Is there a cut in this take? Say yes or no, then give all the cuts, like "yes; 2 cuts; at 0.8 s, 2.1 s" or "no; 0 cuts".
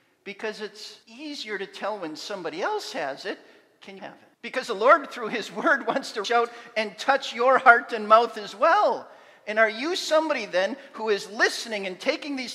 yes; 4 cuts; at 1.0 s, 4.0 s, 4.3 s, 6.2 s